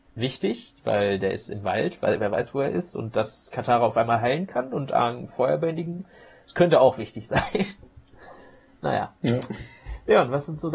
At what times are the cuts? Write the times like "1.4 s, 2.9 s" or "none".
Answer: none